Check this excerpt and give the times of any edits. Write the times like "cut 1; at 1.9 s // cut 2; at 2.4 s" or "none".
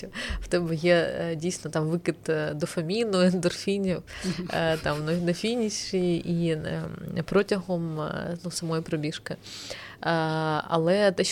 none

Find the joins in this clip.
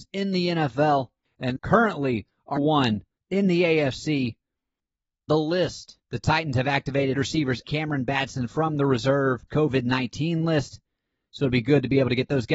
cut 1; at 1.6 s // cut 2; at 2.6 s // cut 3; at 5.3 s // cut 4; at 6.0 s // cut 5; at 7.1 s // cut 6; at 7.6 s // cut 7; at 9.5 s

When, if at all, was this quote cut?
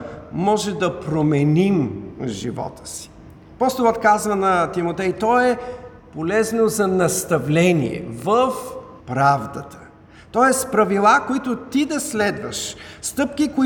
cut 1; at 9.0 s

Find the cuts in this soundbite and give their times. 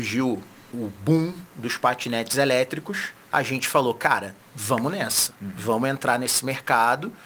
cut 1; at 3.2 s // cut 2; at 4.4 s

